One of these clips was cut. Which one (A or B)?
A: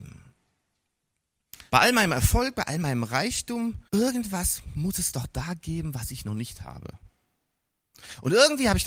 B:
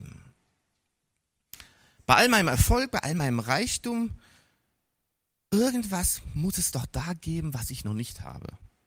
A